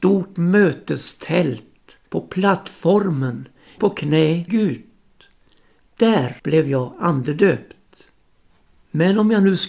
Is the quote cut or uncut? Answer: cut